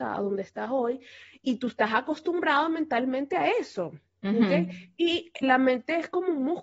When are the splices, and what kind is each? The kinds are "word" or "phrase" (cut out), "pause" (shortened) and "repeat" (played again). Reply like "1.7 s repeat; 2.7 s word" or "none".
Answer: 5.4 s word